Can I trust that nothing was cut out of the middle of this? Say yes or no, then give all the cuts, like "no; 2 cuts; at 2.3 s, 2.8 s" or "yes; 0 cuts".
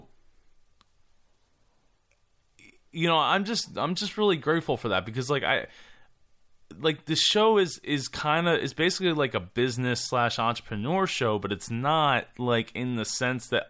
yes; 0 cuts